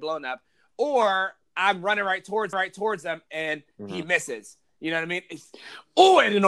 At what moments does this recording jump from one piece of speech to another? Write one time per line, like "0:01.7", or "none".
0:02.5